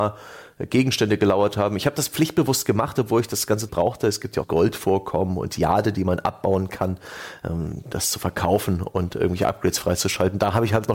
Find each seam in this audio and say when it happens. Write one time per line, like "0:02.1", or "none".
0:03.7
0:04.4